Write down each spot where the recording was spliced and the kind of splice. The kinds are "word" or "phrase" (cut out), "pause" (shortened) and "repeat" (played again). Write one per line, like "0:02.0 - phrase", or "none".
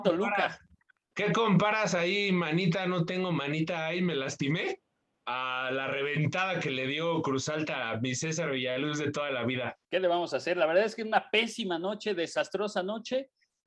0:09.8 - pause